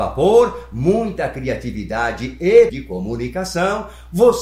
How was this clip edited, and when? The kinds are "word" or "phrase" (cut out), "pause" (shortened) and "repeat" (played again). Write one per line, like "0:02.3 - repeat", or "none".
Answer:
0:02.7 - word